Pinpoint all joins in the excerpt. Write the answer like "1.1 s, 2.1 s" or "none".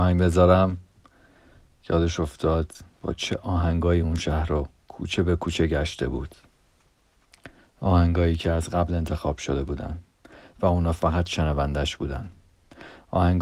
none